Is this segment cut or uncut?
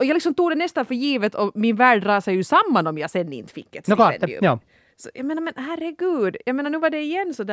uncut